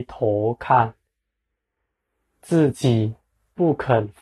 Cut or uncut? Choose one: uncut